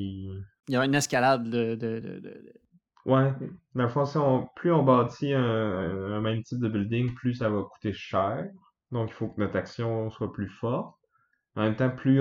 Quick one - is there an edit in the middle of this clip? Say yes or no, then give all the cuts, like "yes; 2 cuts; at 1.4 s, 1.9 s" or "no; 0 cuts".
no; 0 cuts